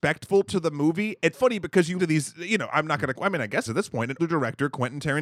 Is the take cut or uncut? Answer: cut